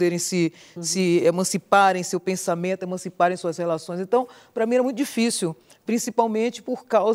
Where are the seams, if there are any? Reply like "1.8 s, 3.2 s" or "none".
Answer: none

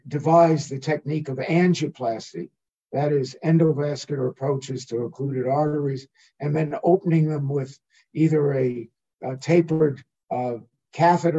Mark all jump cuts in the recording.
none

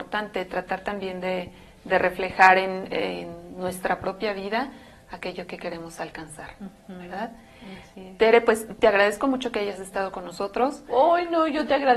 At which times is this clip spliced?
none

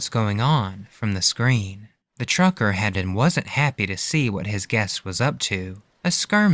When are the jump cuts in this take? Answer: 2.9 s

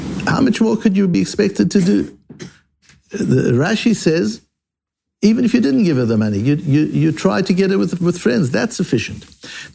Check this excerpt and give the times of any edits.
none

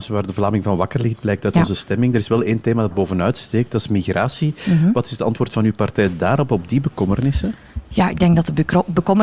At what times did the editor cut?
2.9 s

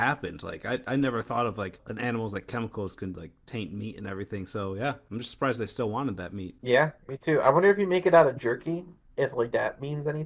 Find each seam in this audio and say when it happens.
1.8 s

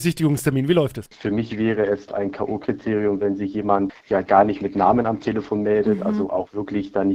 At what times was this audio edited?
none

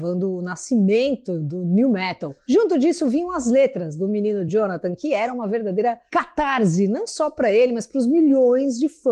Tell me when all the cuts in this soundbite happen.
none

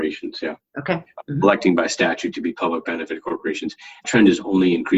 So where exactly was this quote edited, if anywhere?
4.0 s

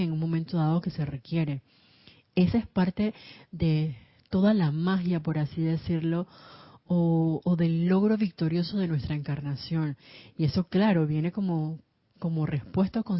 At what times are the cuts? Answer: none

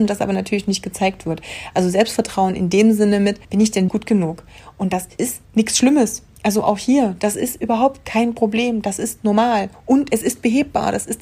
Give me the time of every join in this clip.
3.4 s, 3.9 s, 5.4 s, 6.4 s

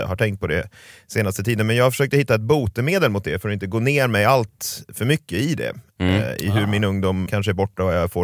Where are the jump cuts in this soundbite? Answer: 7.3 s

